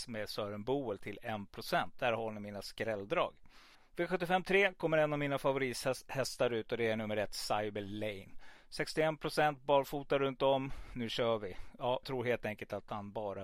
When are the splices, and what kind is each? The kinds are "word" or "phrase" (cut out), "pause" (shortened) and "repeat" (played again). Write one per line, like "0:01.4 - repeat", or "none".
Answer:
0:03.7 - pause
0:12.0 - word

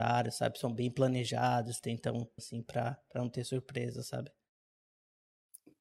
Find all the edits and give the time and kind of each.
0:02.4 - phrase

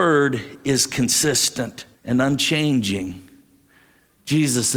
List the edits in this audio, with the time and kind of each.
0:01.9 - pause

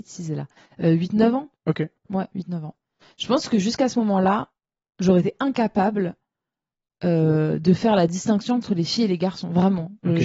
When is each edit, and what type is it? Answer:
none

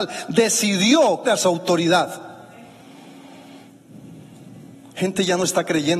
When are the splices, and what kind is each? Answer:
0:01.2 - word

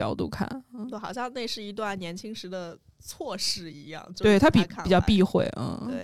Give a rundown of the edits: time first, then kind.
0:00.9 - phrase

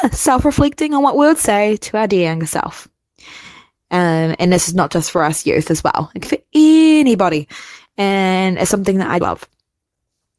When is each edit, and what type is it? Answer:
0:06.2 - word
0:09.2 - phrase

